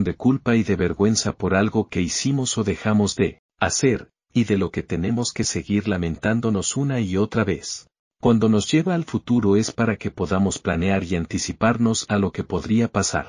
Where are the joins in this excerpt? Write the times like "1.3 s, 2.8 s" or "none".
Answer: none

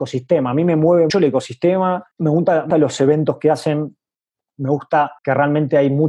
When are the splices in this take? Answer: 1.1 s, 2.1 s, 2.7 s, 5.2 s

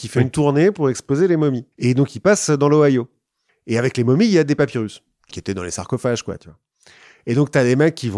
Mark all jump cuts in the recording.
1.7 s, 5.3 s

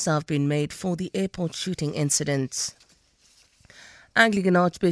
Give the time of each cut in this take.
none

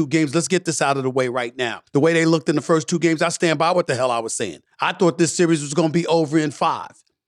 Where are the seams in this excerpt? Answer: 1.9 s, 4.7 s

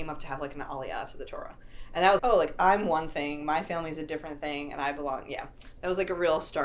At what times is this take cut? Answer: 2.2 s

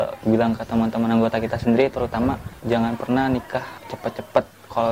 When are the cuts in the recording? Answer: none

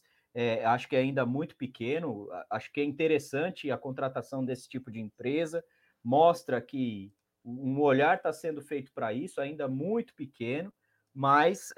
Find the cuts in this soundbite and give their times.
none

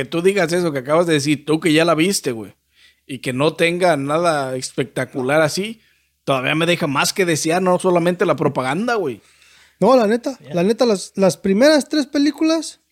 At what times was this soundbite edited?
none

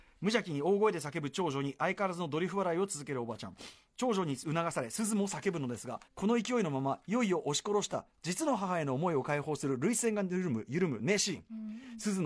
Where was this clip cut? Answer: 6.0 s

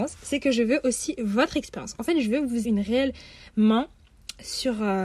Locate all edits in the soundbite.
2.6 s

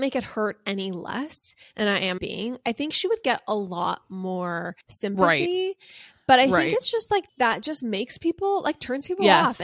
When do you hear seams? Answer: 2.2 s, 4.8 s, 7.3 s

